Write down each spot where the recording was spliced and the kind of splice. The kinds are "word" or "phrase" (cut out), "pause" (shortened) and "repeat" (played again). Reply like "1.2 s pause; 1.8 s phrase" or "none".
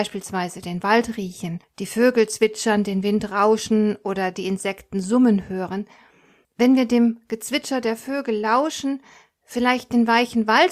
1.6 s pause

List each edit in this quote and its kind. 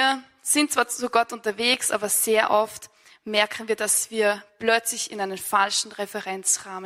none

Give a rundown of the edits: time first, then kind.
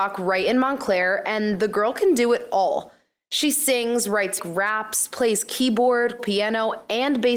4.4 s word; 6.2 s word

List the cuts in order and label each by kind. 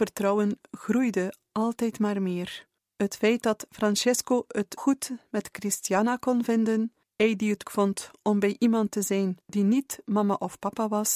2.8 s pause; 4.8 s word; 7.0 s pause; 7.6 s word; 9.4 s pause

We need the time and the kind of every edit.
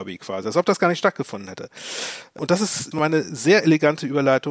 2.9 s word

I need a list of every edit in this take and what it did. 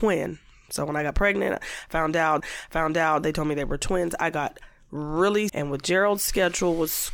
2.4 s repeat; 5.5 s phrase

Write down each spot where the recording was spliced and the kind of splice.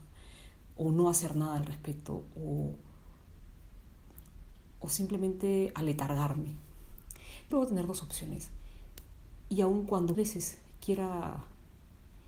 7.5 s word; 10.1 s word

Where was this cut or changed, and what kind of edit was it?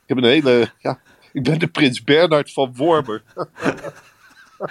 none

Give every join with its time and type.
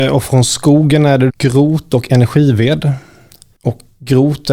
1.3 s word

